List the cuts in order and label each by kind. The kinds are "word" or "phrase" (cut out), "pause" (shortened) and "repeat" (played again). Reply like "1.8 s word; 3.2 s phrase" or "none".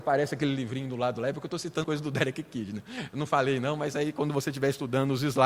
1.8 s word